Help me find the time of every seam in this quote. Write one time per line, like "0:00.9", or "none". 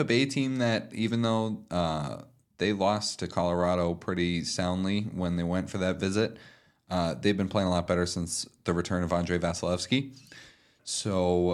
none